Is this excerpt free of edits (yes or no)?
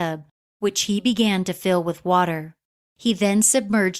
yes